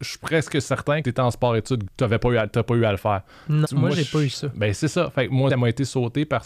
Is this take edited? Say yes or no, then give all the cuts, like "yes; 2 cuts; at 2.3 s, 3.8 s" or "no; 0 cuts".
yes; 4 cuts; at 1.0 s, 1.9 s, 3.6 s, 5.5 s